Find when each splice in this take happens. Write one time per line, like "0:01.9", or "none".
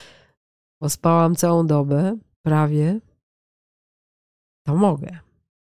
0:02.3